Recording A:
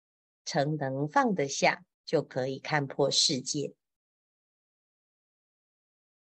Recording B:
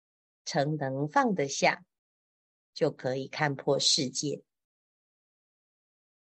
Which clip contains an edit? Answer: A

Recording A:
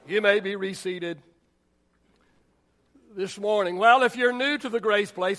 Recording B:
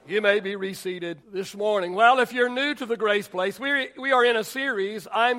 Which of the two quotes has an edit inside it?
B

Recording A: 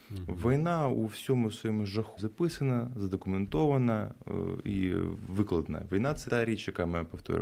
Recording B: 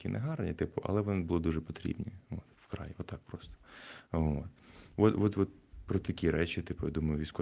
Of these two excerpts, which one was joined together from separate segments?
A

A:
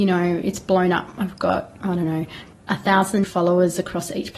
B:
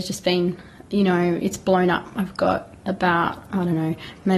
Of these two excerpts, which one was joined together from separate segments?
A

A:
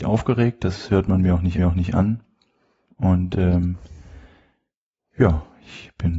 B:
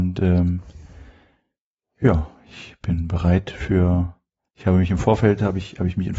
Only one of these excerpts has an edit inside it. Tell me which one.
A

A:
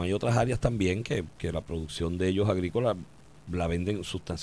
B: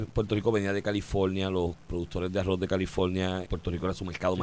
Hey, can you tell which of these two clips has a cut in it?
B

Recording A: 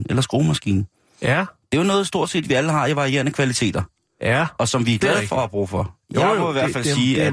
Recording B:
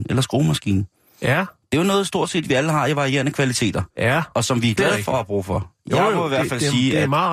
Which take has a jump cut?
B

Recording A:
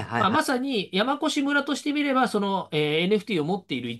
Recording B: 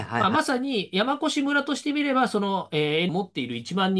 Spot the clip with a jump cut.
B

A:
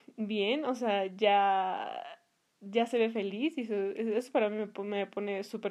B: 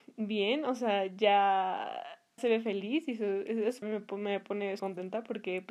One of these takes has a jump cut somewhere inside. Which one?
B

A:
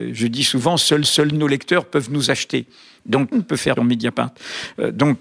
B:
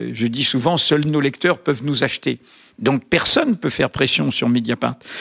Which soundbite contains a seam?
A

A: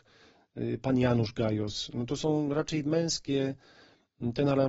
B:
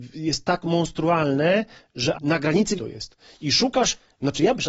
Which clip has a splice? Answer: B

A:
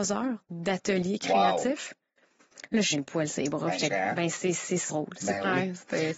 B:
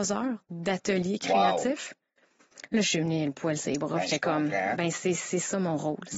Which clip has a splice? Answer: A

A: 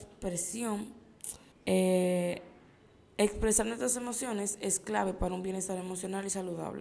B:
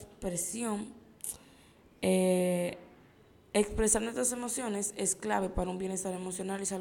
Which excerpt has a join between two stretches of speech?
A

